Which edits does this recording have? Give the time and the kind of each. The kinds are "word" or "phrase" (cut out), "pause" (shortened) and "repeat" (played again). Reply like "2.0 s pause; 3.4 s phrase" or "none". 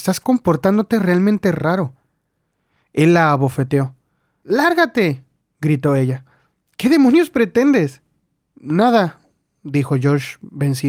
none